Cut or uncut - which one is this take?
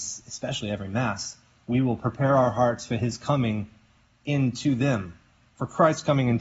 uncut